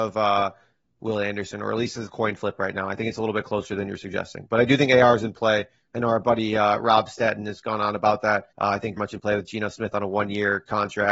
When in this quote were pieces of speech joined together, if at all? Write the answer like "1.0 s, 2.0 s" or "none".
2.1 s, 8.5 s, 9.0 s